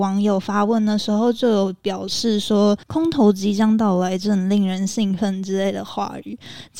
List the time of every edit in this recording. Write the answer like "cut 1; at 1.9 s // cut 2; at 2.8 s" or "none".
cut 1; at 2.8 s